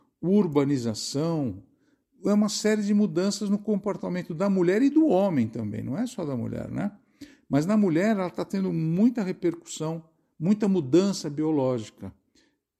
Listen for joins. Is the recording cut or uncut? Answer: uncut